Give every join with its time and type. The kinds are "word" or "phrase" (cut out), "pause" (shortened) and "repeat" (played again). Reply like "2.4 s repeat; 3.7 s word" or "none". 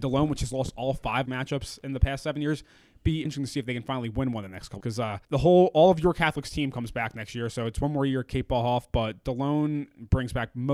1.3 s phrase; 3.3 s word; 4.8 s word; 5.2 s pause